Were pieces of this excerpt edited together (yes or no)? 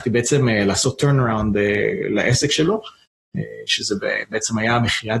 no